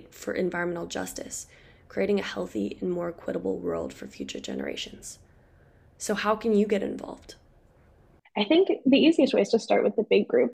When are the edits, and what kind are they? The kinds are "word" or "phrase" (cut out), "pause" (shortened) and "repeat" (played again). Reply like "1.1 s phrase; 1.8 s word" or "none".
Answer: none